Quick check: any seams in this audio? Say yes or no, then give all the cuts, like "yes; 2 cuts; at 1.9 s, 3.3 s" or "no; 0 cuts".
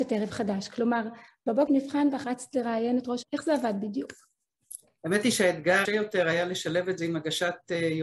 yes; 4 cuts; at 1.7 s, 2.2 s, 3.2 s, 5.8 s